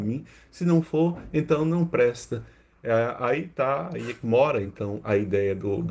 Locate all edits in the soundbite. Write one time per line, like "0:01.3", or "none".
none